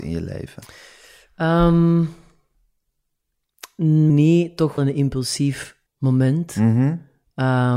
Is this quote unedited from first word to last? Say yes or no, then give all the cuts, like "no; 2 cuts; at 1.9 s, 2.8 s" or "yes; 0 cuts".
no; 3 cuts; at 4.1 s, 4.8 s, 5.9 s